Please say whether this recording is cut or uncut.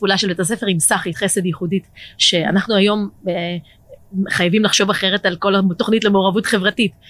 cut